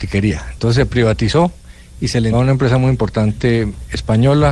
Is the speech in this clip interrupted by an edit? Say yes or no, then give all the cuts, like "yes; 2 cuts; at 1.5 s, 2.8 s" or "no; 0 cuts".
yes; 1 cut; at 2.3 s